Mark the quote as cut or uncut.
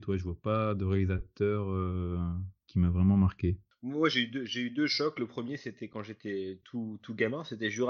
uncut